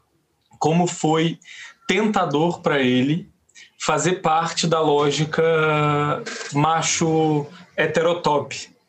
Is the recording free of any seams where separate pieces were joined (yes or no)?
yes